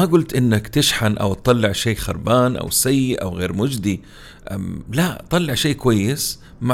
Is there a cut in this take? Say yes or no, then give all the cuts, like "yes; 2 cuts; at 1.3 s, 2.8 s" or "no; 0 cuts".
no; 0 cuts